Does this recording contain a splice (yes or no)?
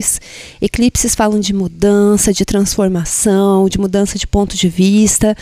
no